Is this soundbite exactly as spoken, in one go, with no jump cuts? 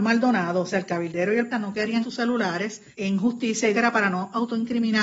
no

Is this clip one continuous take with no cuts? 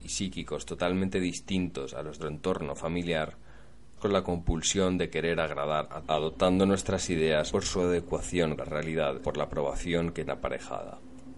no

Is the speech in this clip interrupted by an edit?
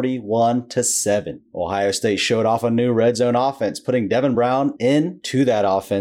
no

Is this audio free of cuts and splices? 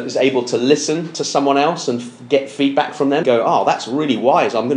no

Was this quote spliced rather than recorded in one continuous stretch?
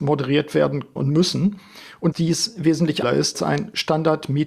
yes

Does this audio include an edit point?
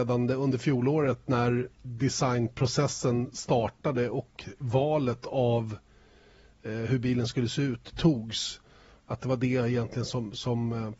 no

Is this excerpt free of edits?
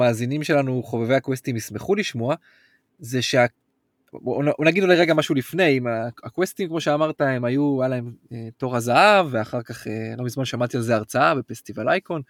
yes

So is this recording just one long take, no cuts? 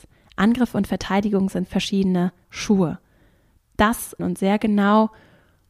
no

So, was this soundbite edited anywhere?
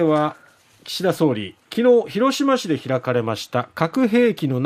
yes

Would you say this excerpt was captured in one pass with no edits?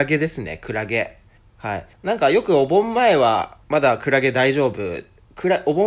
no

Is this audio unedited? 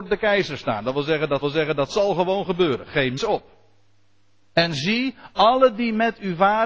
no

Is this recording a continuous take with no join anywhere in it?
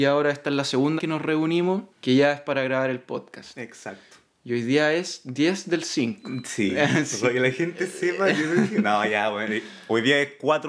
no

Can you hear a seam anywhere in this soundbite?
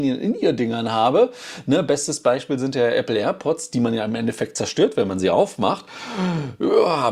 no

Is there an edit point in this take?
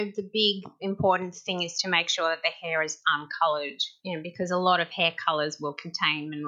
no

